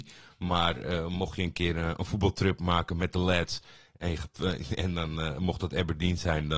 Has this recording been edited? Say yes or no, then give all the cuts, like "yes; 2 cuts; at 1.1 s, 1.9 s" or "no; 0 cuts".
no; 0 cuts